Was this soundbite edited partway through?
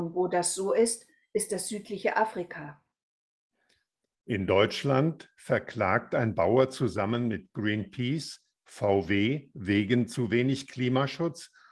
no; 0 cuts

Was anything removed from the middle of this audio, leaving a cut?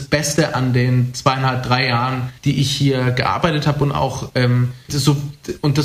yes; 2 cuts; at 2.4 s, 4.9 s

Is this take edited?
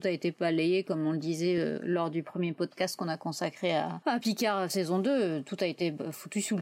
no; 0 cuts

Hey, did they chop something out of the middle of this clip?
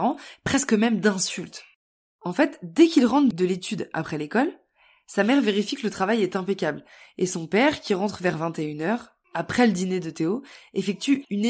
no; 0 cuts

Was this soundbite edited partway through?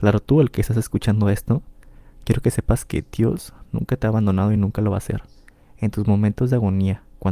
no; 0 cuts

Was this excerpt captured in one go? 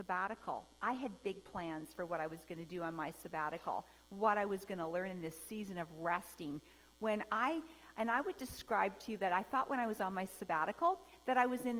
yes; 0 cuts

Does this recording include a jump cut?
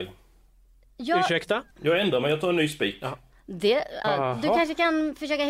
yes; 2 cuts; at 1.7 s, 4.0 s

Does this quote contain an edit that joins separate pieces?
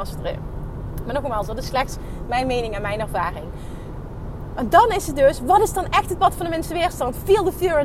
no; 0 cuts

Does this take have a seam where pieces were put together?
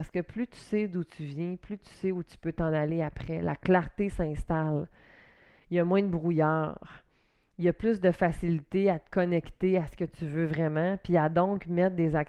no; 0 cuts

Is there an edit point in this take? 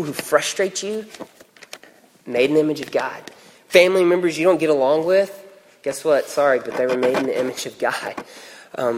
no; 0 cuts

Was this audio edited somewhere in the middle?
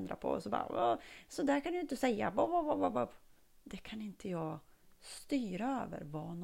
no; 0 cuts

